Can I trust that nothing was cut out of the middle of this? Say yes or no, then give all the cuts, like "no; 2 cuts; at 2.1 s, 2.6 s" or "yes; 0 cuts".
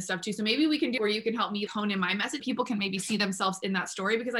no; 3 cuts; at 1.0 s, 1.7 s, 2.4 s